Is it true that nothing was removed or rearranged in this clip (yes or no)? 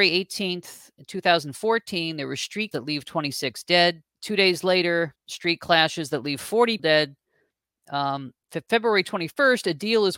no